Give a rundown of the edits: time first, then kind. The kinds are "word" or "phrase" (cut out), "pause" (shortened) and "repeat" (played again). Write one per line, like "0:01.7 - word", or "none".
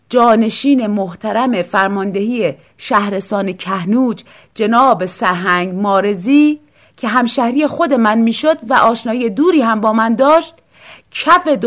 none